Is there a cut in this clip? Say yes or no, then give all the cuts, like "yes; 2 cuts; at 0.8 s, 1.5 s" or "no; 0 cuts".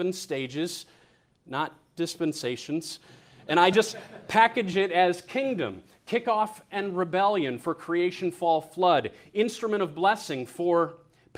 no; 0 cuts